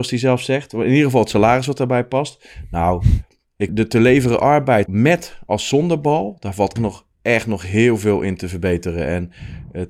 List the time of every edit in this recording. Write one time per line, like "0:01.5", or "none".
0:03.7
0:04.9
0:06.8